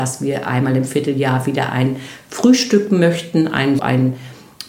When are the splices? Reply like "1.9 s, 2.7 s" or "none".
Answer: 3.8 s